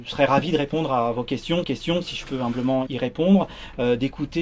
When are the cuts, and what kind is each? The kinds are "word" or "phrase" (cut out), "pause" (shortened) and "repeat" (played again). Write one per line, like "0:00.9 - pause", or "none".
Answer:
0:01.6 - repeat
0:02.9 - word